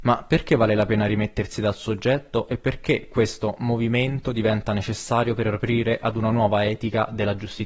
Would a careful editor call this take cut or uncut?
uncut